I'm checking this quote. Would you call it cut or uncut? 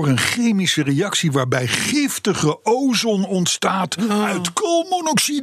uncut